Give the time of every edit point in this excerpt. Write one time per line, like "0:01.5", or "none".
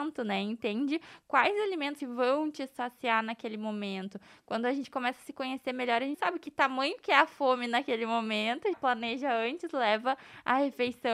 0:02.0
0:06.1
0:08.7